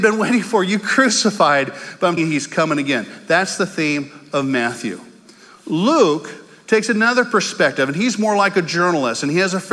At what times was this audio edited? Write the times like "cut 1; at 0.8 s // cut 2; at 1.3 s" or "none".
cut 1; at 2.2 s